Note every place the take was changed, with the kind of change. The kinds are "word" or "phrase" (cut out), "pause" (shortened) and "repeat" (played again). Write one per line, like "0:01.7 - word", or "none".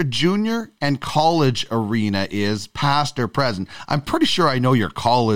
none